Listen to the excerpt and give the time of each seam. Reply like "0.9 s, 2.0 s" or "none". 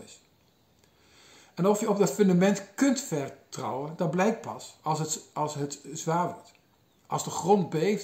none